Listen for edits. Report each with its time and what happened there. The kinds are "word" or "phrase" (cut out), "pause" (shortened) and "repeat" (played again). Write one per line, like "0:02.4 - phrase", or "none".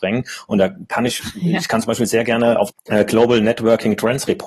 0:02.7 - word